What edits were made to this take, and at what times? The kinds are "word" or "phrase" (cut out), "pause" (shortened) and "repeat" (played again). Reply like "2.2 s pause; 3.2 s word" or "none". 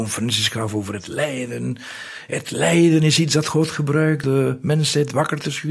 4.2 s word